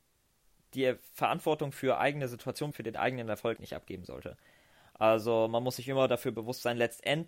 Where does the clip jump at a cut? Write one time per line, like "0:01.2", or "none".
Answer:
0:02.7
0:03.6